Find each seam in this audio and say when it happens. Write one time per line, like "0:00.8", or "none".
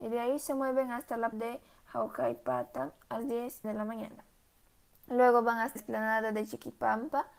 0:01.3
0:03.2
0:03.6
0:05.8